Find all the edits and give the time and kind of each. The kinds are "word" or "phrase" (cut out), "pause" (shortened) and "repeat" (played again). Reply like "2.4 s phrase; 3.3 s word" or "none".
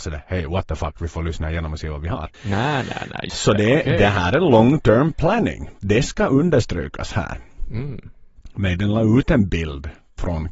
2.3 s pause; 3.3 s word